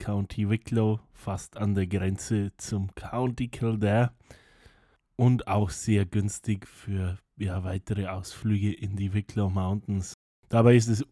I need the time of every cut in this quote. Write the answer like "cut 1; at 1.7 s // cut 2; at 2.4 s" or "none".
none